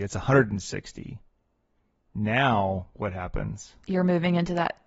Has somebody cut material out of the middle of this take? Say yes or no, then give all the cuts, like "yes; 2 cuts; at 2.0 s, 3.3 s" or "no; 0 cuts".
no; 0 cuts